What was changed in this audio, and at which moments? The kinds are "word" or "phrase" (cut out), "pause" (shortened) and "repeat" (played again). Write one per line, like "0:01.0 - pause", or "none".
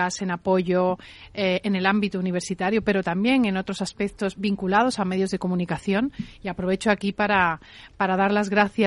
none